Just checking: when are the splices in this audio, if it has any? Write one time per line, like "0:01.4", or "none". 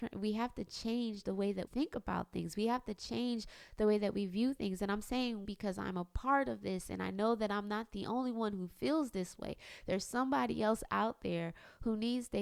0:01.7
0:05.4